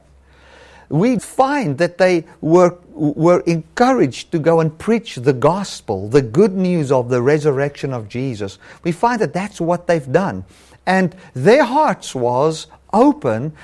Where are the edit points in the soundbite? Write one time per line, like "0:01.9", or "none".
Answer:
0:01.2